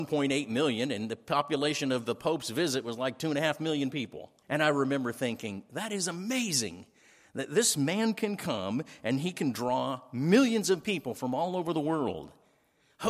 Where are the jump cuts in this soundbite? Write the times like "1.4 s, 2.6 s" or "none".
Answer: 4.4 s